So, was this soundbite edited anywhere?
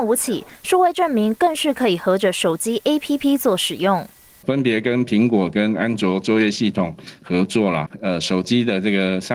no; 0 cuts

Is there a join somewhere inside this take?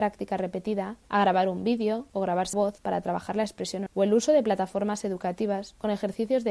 yes; 2 cuts; at 2.5 s, 3.9 s

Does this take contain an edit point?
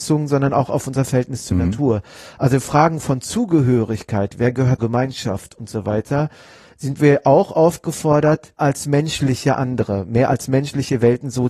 yes; 2 cuts; at 4.8 s, 8.6 s

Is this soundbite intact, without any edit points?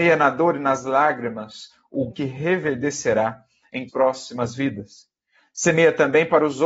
no; 2 cuts; at 2.1 s, 3.9 s

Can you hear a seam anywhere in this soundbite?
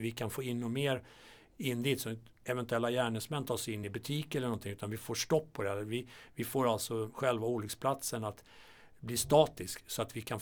no; 0 cuts

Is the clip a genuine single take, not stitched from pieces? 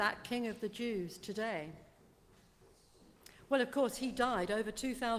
yes; 0 cuts

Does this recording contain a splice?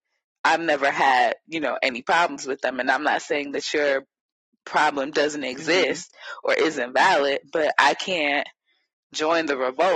no; 0 cuts

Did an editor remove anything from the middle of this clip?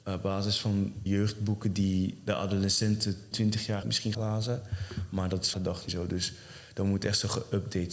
yes; 6 cuts; at 1.1 s, 3.3 s, 3.8 s, 4.1 s, 5.5 s, 5.9 s

